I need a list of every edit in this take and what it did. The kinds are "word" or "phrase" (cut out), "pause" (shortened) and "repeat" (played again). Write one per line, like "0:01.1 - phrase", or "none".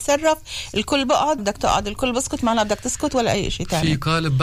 0:01.4 - word